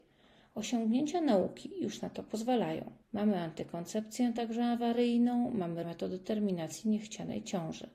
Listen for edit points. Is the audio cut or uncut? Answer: cut